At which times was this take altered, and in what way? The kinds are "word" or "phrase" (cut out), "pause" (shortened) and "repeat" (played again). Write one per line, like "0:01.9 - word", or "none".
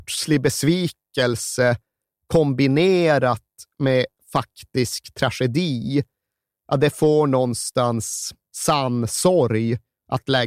none